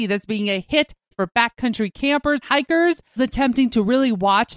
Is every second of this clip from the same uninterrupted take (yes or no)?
no